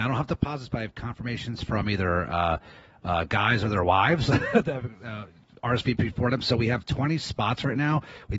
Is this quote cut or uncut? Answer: uncut